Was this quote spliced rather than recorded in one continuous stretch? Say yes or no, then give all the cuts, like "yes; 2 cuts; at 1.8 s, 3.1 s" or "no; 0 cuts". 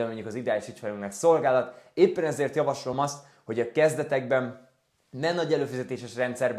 no; 0 cuts